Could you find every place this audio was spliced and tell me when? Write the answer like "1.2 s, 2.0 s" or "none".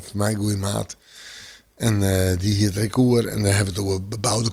none